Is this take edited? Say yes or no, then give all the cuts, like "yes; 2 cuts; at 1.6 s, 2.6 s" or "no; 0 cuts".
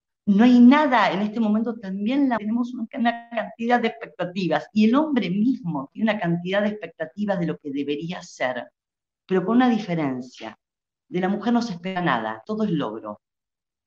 yes; 2 cuts; at 2.4 s, 12.4 s